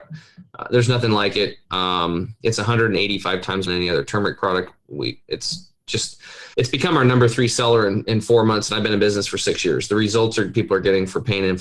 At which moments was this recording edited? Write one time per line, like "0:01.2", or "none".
0:03.7
0:06.5